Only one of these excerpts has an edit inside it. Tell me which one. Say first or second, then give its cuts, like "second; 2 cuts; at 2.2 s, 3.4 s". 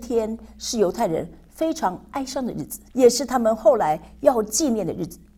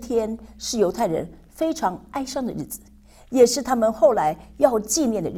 first; 1 cut; at 2.9 s